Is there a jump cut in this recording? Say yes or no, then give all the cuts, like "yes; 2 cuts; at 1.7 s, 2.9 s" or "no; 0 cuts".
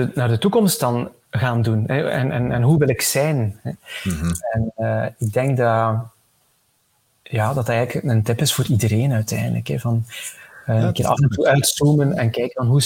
no; 0 cuts